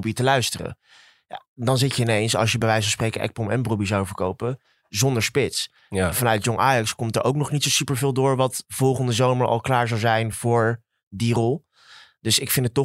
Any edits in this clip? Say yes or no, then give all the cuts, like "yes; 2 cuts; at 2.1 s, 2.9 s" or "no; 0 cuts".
no; 0 cuts